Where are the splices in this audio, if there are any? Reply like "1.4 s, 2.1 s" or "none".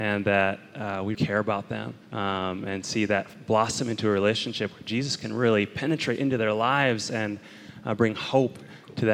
1.1 s, 2.0 s